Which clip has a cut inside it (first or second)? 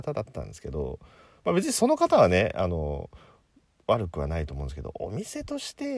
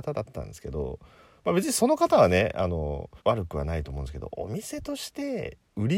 second